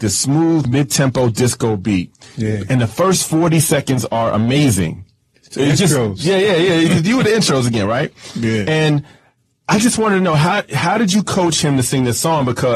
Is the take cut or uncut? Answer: uncut